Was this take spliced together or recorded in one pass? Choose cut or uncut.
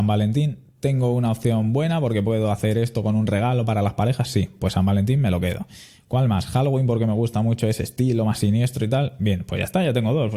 uncut